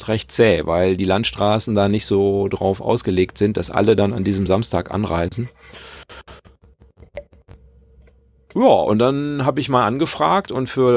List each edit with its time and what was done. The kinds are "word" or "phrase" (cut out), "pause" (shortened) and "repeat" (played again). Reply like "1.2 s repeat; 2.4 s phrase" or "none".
none